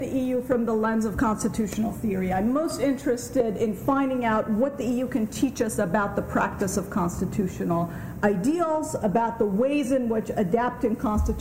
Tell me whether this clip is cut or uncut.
uncut